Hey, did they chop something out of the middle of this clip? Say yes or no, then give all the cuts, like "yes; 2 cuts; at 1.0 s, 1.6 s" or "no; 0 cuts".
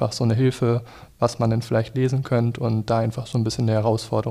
no; 0 cuts